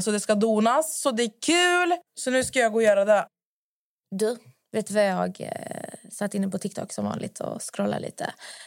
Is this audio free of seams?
yes; 0 cuts

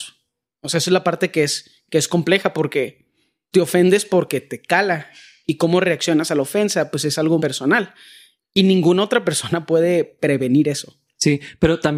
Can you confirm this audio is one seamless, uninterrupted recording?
no; 2 cuts; at 3.5 s, 7.4 s

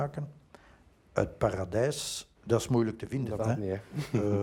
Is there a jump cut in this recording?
yes; 2 cuts; at 2.3 s, 3.4 s

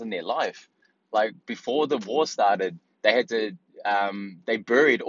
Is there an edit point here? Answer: no; 0 cuts

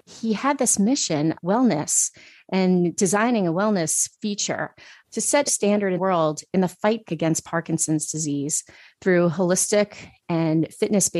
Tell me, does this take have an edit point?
yes; 4 cuts; at 1.4 s, 5.5 s, 6.0 s, 7.1 s

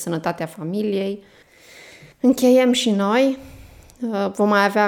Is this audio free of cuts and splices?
no; 1 cut; at 2.1 s

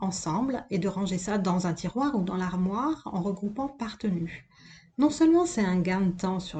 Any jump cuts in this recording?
no; 0 cuts

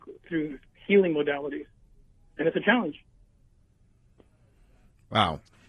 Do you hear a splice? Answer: no; 0 cuts

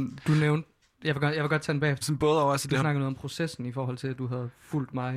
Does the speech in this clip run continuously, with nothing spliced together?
no; 1 cut; at 2.0 s

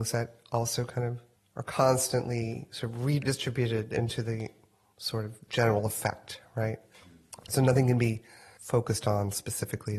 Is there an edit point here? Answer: no; 0 cuts

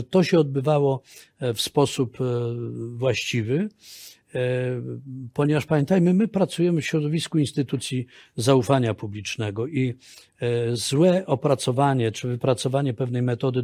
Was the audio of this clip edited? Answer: no; 0 cuts

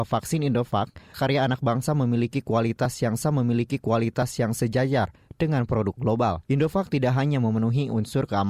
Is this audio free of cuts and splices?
no; 3 cuts; at 1.1 s, 3.2 s, 6.4 s

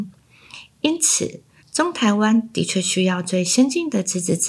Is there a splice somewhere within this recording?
yes; 1 cut; at 1.6 s

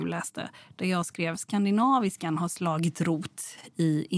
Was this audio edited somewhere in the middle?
no; 0 cuts

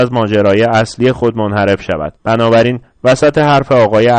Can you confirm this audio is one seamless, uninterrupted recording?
no; 1 cut; at 2.2 s

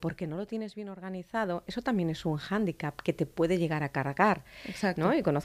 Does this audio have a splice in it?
no; 0 cuts

